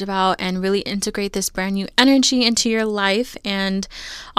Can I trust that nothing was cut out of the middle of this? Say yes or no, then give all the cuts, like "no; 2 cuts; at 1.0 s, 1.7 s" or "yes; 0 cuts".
yes; 0 cuts